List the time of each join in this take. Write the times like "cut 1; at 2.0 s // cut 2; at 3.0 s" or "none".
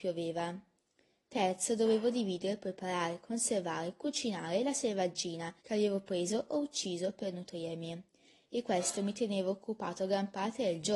cut 1; at 5.6 s